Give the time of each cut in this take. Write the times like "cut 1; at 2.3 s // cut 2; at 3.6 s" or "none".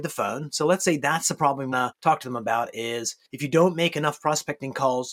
cut 1; at 1.7 s